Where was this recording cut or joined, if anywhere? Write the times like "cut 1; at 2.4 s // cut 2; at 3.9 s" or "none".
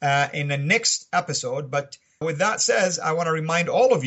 cut 1; at 2.2 s